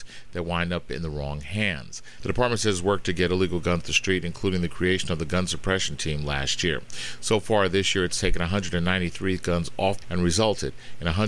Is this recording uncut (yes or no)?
no